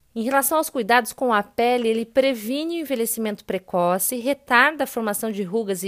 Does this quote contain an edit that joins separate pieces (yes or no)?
no